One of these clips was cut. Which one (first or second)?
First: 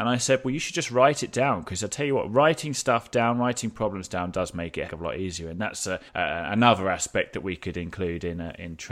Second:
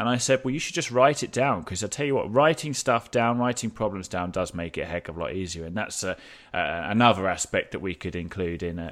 first